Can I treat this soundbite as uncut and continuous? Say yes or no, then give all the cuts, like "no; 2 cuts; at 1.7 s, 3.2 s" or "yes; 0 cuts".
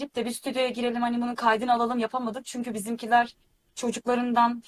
yes; 0 cuts